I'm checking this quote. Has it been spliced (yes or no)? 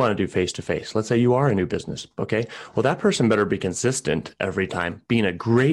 no